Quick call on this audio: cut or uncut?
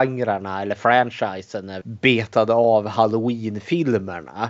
cut